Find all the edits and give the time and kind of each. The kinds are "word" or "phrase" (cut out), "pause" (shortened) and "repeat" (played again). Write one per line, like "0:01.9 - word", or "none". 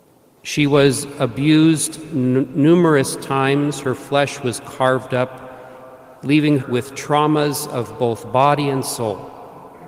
0:06.6 - word